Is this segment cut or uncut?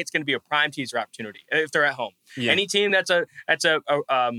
uncut